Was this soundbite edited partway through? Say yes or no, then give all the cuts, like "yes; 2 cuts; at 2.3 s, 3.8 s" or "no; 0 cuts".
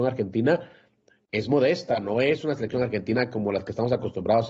no; 0 cuts